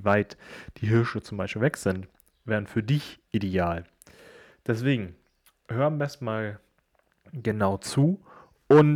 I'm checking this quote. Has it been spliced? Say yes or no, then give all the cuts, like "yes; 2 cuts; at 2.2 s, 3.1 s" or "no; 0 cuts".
no; 0 cuts